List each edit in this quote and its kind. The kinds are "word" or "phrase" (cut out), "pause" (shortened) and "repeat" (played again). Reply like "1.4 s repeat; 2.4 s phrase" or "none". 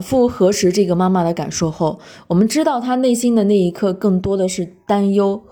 none